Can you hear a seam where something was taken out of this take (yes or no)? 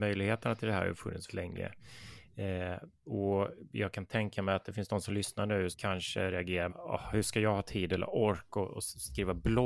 yes